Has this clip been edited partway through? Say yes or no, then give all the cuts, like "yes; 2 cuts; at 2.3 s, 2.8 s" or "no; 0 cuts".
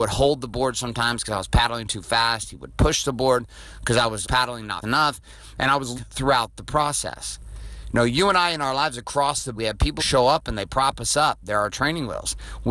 yes; 5 cuts; at 4.2 s, 4.8 s, 6.0 s, 9.6 s, 10.0 s